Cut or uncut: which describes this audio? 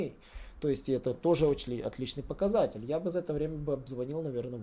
uncut